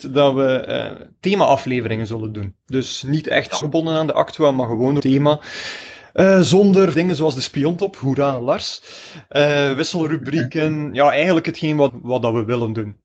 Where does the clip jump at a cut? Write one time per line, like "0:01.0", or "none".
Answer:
0:03.6
0:05.0
0:06.9
0:11.9